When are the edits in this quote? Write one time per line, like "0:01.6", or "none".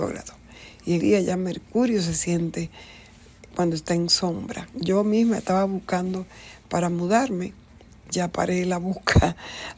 0:01.0
0:03.5
0:08.1